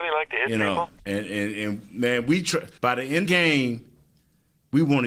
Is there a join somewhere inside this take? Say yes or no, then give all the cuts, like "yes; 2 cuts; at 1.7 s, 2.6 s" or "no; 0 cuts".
yes; 3 cuts; at 1.0 s, 2.8 s, 3.2 s